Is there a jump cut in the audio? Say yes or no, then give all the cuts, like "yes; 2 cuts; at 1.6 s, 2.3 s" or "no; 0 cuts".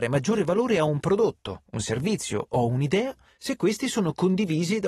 no; 0 cuts